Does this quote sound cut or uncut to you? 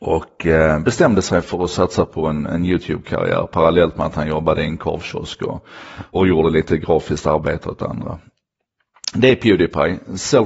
cut